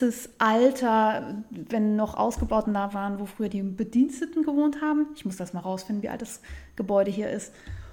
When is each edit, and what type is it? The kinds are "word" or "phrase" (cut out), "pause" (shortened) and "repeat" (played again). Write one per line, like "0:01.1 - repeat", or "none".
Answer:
0:02.6 - word